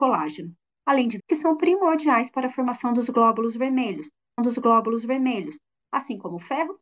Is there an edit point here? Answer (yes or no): yes